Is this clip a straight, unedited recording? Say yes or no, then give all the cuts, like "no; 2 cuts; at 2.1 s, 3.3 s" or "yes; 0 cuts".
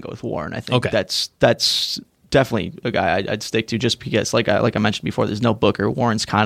yes; 0 cuts